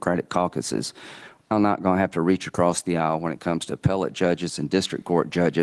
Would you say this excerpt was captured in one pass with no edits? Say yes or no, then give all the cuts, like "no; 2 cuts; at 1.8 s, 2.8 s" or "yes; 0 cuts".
no; 1 cut; at 1.5 s